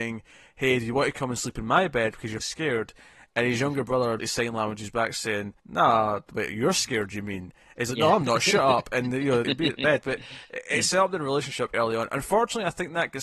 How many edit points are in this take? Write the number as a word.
five